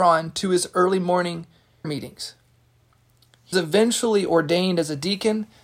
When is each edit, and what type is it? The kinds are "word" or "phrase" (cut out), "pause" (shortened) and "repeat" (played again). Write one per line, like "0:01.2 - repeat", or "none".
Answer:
0:01.8 - word
0:03.5 - word